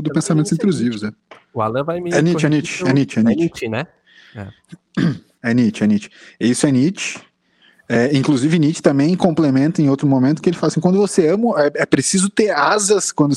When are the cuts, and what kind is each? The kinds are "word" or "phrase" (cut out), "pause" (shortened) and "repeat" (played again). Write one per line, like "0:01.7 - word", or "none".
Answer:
none